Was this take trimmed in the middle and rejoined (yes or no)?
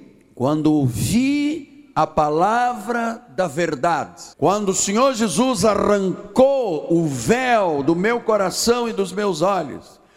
yes